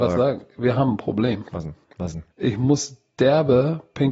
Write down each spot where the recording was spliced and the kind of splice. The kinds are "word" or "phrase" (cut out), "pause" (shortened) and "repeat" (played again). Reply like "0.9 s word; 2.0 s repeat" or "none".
1.8 s pause; 2.3 s pause